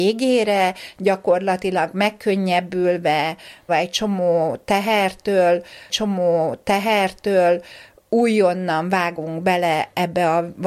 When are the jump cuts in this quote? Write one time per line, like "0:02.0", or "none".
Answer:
0:03.7
0:05.9